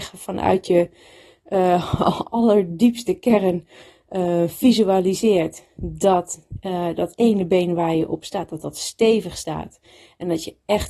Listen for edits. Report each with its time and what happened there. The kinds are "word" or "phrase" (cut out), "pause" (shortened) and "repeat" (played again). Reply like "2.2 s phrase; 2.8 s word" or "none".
none

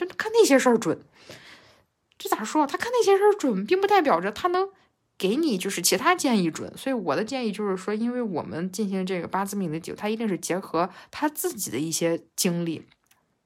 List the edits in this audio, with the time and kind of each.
none

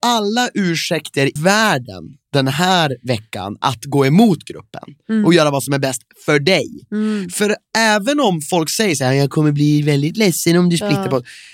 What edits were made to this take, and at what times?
1.4 s word

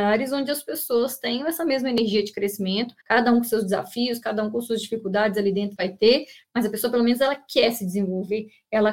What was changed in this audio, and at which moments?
3.0 s pause

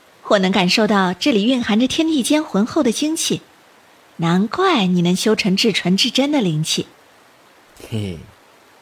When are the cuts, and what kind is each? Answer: none

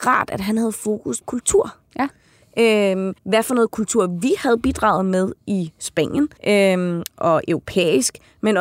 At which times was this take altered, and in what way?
1.2 s word; 3.2 s pause; 5.4 s pause; 6.4 s pause

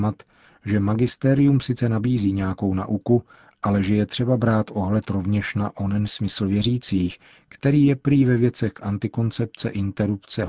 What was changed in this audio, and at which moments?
none

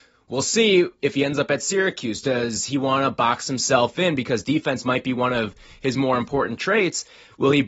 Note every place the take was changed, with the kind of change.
none

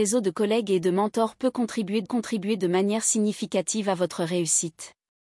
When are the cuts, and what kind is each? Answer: 2.1 s repeat

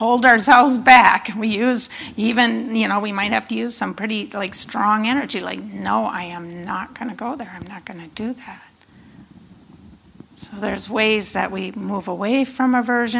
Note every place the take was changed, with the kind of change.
10.3 s pause

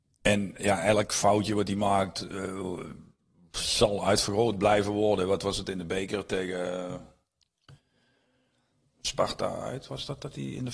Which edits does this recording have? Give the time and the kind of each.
none

